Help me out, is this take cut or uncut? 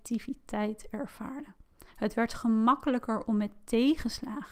uncut